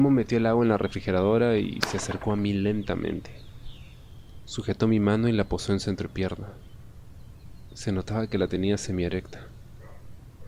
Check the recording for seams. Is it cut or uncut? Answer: uncut